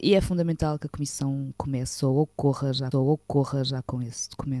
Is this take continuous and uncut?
no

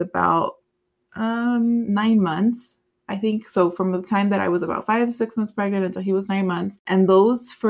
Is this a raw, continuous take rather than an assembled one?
yes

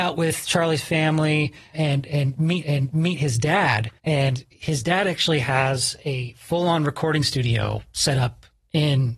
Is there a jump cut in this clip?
yes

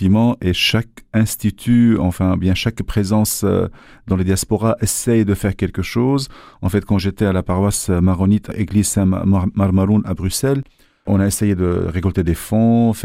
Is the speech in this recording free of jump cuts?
yes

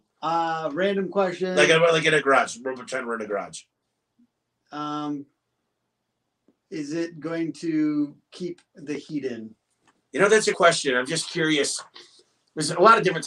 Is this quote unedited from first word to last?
no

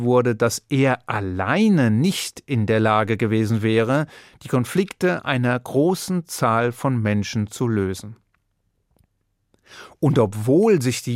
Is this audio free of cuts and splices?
yes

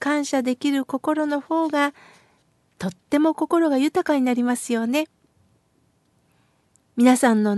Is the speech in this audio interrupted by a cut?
no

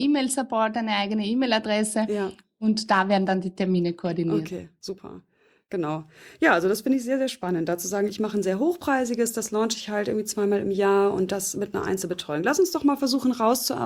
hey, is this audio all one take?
yes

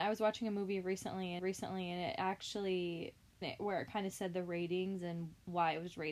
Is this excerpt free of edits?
no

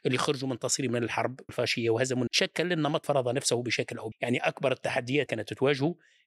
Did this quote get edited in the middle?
yes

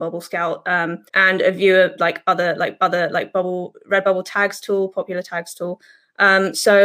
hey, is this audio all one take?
no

